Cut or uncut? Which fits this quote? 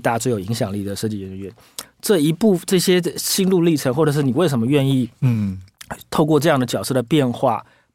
uncut